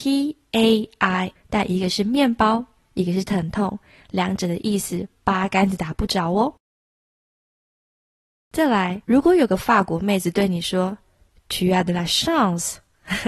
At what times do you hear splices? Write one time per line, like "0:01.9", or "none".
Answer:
0:01.4
0:09.0